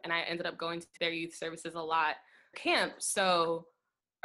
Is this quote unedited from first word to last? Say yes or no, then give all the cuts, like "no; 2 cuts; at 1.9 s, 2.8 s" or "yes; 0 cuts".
no; 2 cuts; at 1.0 s, 2.5 s